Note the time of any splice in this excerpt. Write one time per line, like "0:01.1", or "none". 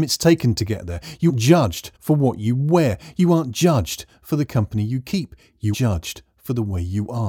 0:01.3
0:01.9
0:05.7